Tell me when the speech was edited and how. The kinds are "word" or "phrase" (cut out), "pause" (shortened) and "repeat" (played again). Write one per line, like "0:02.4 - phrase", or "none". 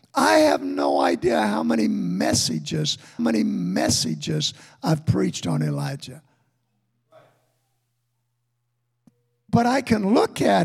0:03.2 - repeat